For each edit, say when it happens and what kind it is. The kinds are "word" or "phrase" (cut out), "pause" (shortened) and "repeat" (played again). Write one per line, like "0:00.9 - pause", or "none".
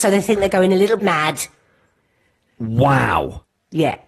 0:01.0 - word